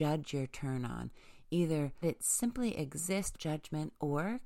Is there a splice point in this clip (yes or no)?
yes